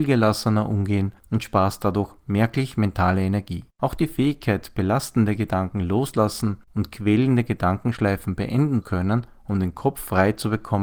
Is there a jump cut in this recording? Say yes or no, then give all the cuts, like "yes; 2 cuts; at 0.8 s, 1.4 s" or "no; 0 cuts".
yes; 4 cuts; at 1.2 s, 3.7 s, 6.6 s, 8.8 s